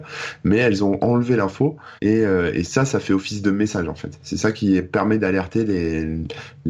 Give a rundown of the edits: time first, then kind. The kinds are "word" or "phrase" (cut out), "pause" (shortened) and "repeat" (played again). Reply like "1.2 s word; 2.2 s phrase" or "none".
2.0 s pause